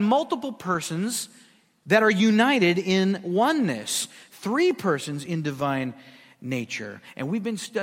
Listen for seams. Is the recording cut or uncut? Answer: uncut